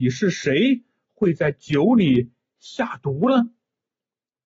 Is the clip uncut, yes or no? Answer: yes